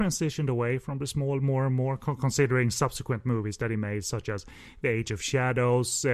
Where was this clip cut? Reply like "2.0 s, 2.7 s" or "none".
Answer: none